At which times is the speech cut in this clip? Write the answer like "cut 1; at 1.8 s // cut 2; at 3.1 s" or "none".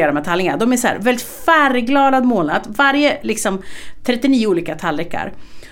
none